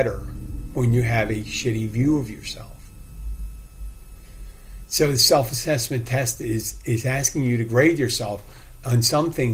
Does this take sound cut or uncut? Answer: uncut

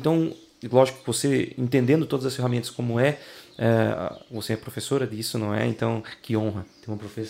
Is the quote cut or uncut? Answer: uncut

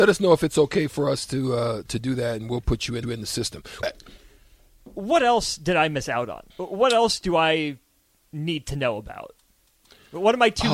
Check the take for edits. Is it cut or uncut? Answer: cut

